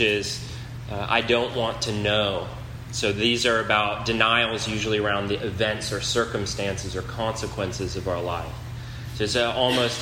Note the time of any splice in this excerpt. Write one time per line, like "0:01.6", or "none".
none